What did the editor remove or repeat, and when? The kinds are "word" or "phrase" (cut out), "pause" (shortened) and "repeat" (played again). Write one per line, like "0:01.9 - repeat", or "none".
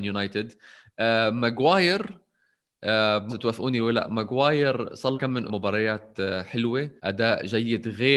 0:03.3 - word
0:05.1 - word
0:05.5 - phrase
0:07.0 - pause